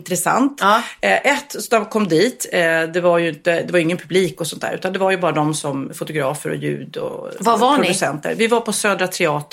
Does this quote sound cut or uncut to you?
uncut